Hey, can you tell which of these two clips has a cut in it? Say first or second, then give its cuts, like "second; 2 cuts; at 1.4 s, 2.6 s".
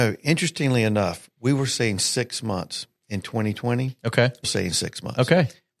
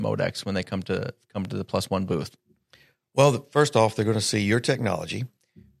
first; 1 cut; at 4.4 s